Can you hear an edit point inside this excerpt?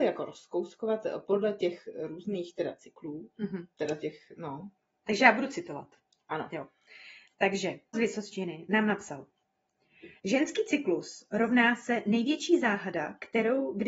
yes; 3 cuts; at 3.7 s, 7.9 s, 10.2 s

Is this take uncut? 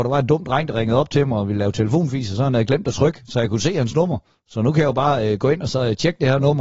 yes; 0 cuts

